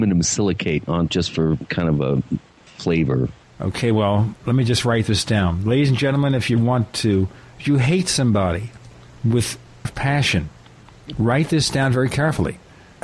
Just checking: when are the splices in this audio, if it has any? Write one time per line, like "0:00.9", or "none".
0:01.1
0:04.4
0:06.6
0:09.8